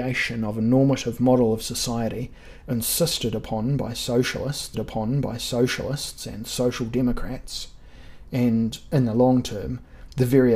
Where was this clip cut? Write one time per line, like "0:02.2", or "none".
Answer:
0:04.7